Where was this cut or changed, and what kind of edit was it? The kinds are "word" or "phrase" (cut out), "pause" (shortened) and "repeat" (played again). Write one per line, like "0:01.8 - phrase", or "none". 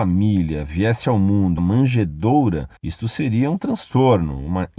0:01.6 - word
0:02.8 - pause